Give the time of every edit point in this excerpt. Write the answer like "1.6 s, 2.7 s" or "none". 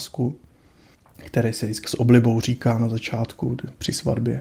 1.8 s